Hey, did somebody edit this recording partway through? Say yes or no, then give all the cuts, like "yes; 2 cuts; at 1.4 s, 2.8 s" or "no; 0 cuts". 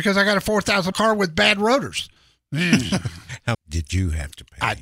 yes; 3 cuts; at 0.9 s, 2.2 s, 3.5 s